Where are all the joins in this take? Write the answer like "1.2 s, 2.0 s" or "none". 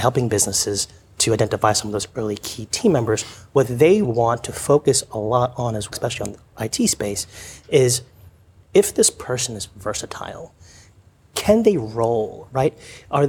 4.0 s, 5.9 s